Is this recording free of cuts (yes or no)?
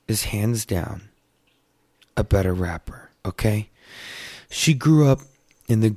no